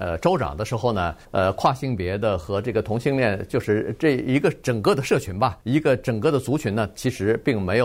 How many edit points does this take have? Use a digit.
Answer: 2